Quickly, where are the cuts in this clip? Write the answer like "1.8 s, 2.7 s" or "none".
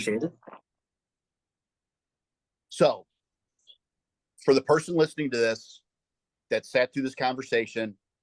none